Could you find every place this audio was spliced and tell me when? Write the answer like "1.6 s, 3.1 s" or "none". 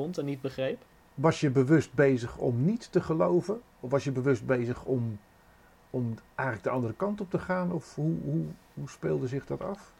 none